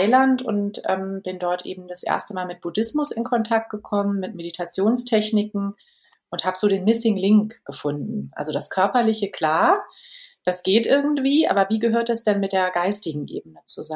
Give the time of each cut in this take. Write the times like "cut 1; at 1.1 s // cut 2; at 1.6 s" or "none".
none